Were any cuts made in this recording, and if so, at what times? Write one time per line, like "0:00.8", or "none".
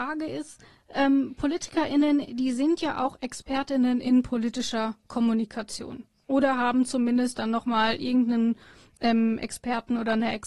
none